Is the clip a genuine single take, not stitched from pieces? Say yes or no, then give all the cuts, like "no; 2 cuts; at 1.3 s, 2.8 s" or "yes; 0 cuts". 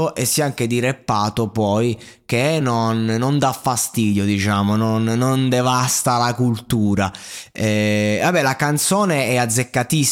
yes; 0 cuts